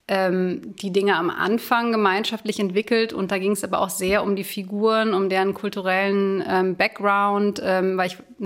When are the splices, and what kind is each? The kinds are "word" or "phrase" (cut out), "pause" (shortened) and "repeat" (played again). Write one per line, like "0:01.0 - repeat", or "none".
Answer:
none